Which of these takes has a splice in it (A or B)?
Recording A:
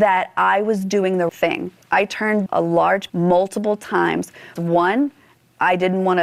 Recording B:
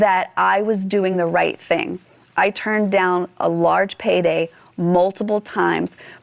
A